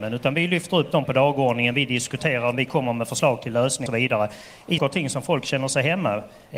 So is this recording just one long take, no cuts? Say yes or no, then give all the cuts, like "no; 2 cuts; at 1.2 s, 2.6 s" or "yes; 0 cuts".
no; 4 cuts; at 1.0 s, 2.5 s, 3.9 s, 4.8 s